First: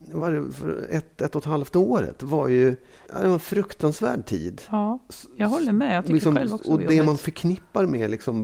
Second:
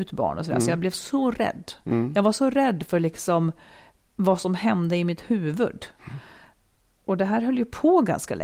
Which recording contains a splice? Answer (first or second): first